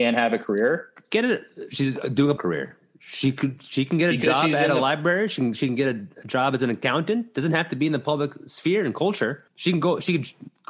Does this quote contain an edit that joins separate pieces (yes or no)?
yes